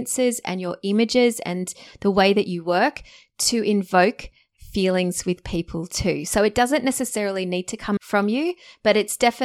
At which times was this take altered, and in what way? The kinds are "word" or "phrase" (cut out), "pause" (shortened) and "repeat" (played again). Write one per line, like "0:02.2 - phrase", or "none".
0:08.0 - word